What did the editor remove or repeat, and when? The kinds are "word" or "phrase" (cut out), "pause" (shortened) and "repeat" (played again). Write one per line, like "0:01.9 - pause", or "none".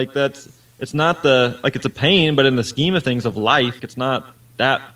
0:03.8 - word

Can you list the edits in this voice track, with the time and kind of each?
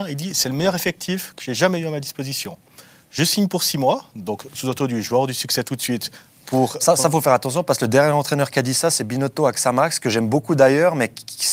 none

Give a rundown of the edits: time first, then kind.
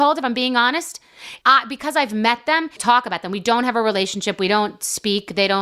0:01.4 - pause
0:02.8 - phrase

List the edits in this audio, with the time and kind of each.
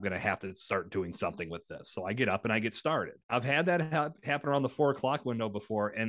0:03.2 - pause

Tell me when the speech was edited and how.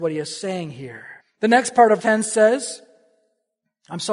0:01.2 - pause
0:02.0 - word

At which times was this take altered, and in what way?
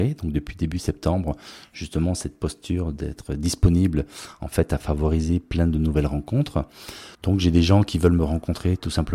0:07.1 - pause

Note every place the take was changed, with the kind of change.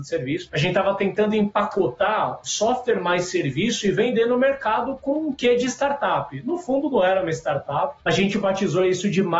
none

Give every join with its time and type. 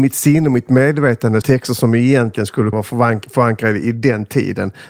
0:01.4 - phrase
0:02.7 - word

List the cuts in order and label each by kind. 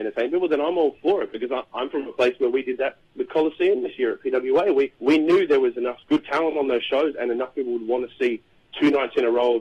0:05.0 - pause
0:06.0 - pause

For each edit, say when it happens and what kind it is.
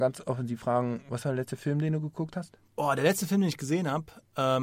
0:02.7 - pause

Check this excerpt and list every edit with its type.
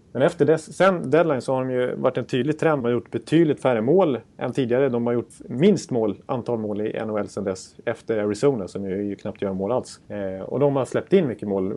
0:02.8 - phrase
0:04.3 - pause
0:05.3 - word
0:10.0 - pause

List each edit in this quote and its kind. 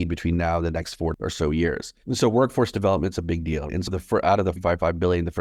0:02.0 - pause

